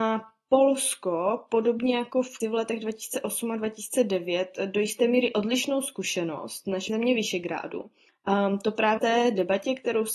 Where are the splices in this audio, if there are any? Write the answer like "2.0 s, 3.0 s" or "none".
2.4 s, 6.9 s, 9.0 s